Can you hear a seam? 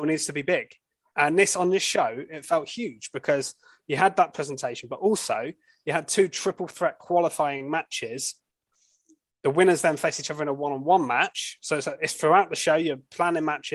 no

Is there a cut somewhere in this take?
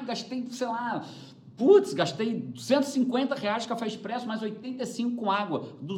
no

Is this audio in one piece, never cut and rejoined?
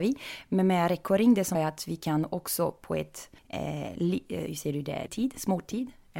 no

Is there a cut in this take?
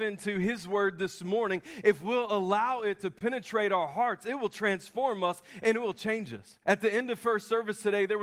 yes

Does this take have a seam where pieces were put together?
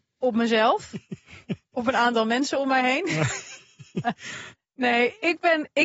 no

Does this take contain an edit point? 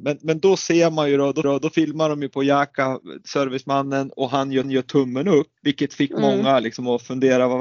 yes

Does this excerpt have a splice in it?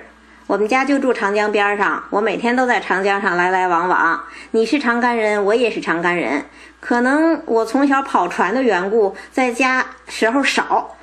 no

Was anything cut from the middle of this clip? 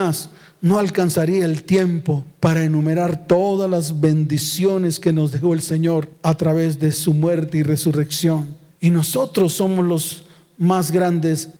no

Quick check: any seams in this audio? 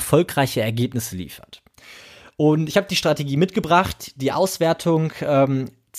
no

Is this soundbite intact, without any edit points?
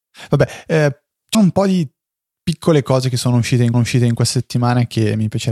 no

